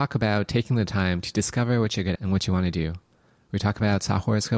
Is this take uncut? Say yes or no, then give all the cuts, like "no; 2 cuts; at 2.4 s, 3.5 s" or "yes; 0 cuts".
no; 1 cut; at 2.1 s